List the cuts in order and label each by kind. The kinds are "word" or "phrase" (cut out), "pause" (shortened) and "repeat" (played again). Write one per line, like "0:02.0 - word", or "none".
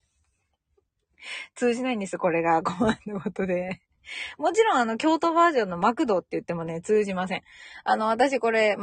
0:03.9 - pause